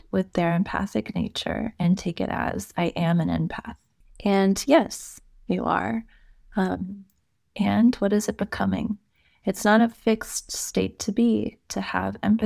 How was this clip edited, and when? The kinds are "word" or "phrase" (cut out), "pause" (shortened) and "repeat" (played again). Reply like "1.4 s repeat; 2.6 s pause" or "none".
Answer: none